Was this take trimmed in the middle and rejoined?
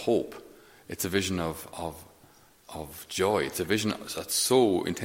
no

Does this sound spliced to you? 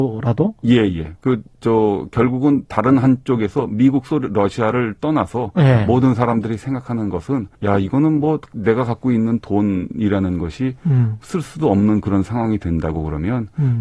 yes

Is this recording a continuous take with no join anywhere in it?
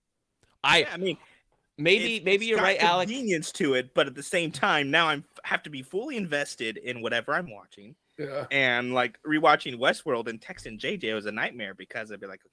yes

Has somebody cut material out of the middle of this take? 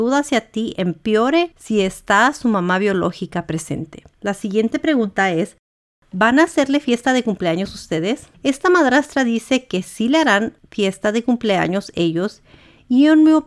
no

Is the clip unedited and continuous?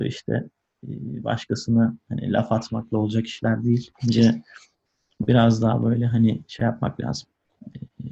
no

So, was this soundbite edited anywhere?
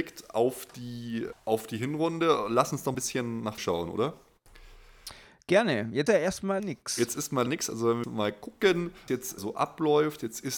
yes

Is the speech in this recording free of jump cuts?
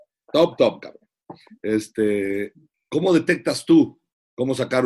yes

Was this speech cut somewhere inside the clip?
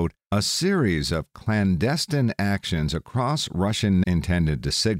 yes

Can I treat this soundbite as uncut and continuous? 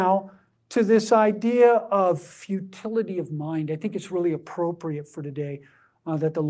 yes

